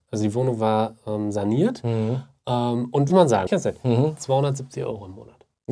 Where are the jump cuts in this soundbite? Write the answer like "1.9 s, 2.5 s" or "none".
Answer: 3.1 s, 3.5 s